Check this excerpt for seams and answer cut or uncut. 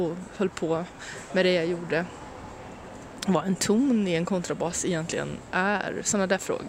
uncut